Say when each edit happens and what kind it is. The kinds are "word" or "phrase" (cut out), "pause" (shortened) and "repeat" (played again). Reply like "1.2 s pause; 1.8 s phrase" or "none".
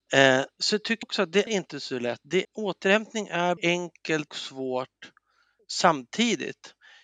1.0 s word; 1.5 s word; 2.4 s word; 3.6 s word; 4.3 s word; 5.6 s word